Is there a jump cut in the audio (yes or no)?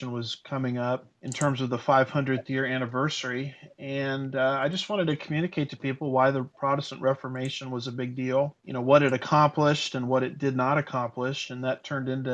yes